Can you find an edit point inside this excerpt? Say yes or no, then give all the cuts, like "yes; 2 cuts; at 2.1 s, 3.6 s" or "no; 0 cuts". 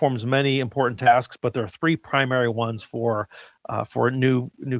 no; 0 cuts